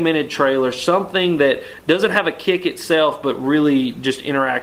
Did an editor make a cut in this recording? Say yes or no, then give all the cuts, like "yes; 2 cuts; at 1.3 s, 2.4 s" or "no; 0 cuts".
no; 0 cuts